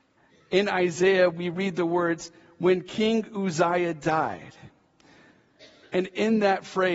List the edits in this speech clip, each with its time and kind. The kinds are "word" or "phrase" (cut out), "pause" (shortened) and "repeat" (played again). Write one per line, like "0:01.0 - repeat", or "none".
none

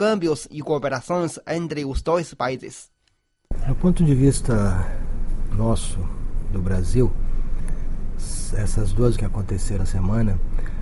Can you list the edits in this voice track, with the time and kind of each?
0:09.2 - word
0:09.8 - word

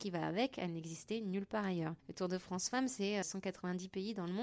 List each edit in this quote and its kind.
0:02.0 - pause
0:03.2 - word

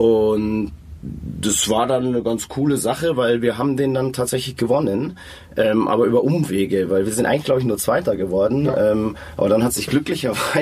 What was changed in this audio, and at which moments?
none

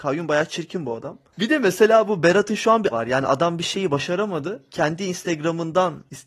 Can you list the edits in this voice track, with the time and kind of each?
0:01.3 - pause
0:02.9 - phrase

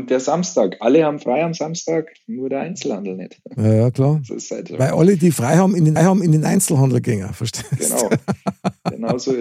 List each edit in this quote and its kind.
0:06.0 - repeat

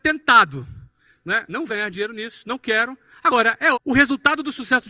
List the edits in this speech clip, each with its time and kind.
0:01.7 - word
0:03.7 - word

